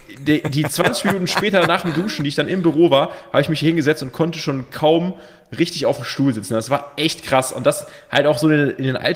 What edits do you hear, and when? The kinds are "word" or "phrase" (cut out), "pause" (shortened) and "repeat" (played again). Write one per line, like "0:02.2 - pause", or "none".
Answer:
none